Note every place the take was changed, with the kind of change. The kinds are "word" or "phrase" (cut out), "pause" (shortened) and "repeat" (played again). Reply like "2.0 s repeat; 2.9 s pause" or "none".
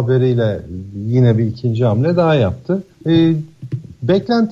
2.9 s pause